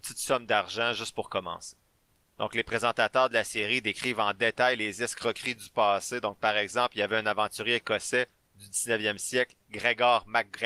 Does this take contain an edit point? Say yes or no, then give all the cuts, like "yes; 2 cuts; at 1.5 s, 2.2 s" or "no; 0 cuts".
no; 0 cuts